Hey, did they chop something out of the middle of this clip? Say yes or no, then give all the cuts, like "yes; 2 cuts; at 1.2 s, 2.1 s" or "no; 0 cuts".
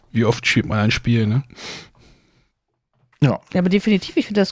no; 0 cuts